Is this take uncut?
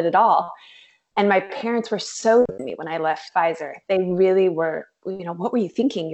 yes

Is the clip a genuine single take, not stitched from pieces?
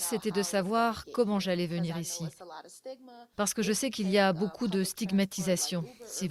yes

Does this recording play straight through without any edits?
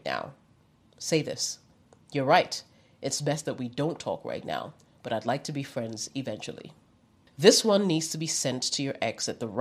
yes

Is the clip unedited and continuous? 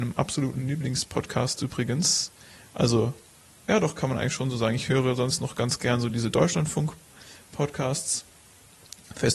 yes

